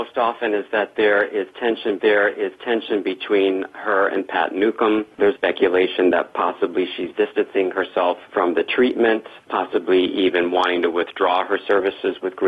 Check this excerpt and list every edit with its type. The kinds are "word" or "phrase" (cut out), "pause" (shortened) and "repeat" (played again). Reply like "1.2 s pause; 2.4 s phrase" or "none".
2.0 s repeat; 5.4 s word